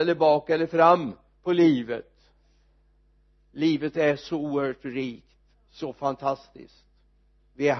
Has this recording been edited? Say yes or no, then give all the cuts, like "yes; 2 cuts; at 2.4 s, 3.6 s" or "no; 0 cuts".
no; 0 cuts